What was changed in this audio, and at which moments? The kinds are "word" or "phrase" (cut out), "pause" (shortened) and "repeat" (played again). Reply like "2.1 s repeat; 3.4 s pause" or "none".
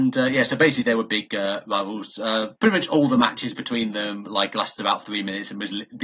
2.6 s pause